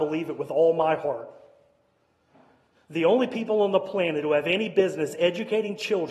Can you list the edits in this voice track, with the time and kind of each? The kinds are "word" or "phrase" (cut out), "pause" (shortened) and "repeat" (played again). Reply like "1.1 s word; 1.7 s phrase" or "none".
none